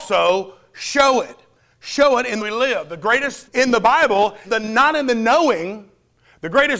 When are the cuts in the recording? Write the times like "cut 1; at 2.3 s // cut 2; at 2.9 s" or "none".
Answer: cut 1; at 2.4 s // cut 2; at 3.5 s // cut 3; at 4.4 s